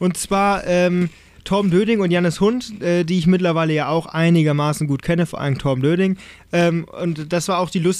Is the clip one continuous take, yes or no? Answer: yes